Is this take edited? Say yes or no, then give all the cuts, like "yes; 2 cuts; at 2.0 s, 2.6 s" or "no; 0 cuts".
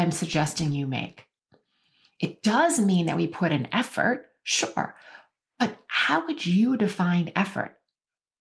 no; 0 cuts